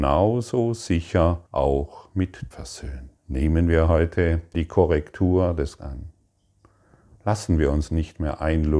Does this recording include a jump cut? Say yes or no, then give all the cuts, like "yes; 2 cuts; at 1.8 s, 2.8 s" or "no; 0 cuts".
yes; 5 cuts; at 1.5 s, 2.5 s, 3.2 s, 4.5 s, 5.8 s